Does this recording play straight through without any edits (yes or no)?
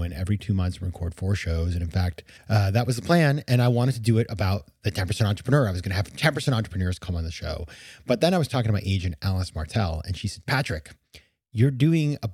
no